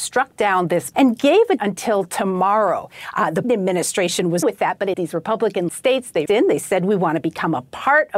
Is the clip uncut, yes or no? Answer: no